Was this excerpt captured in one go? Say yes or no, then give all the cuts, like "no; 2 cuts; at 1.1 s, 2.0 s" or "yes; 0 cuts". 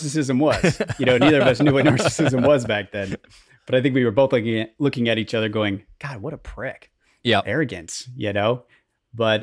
yes; 0 cuts